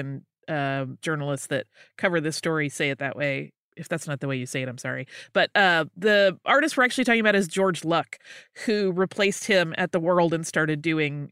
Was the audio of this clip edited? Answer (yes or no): no